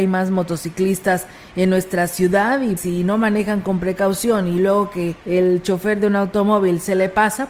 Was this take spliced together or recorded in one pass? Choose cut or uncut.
cut